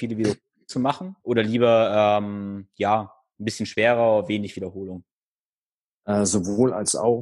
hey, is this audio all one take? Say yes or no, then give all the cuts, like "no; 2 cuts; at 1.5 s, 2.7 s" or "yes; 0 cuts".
no; 1 cut; at 1.2 s